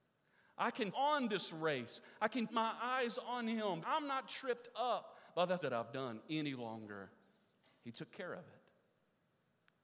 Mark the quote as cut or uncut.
cut